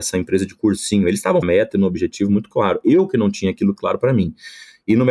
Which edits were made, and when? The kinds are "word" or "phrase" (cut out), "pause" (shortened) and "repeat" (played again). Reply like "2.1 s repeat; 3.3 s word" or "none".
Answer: 1.4 s phrase